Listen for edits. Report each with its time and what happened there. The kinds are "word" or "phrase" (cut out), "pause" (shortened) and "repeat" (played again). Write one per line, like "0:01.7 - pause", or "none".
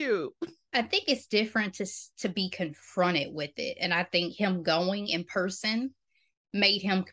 none